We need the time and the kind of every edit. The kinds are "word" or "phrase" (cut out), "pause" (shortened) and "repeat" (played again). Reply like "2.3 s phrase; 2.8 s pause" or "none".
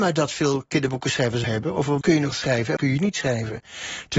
1.4 s word; 2.0 s word; 2.3 s word; 2.8 s word